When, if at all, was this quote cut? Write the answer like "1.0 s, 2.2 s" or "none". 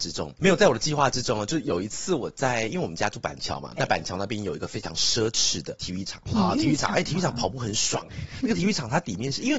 3.8 s